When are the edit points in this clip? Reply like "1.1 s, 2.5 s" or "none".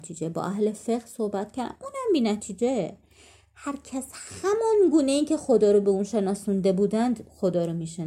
none